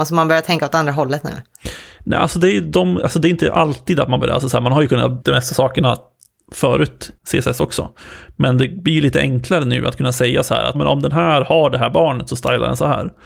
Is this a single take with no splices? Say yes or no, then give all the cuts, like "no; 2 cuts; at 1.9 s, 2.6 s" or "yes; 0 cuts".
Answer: no; 4 cuts; at 4.2 s, 5.2 s, 7.2 s, 10.7 s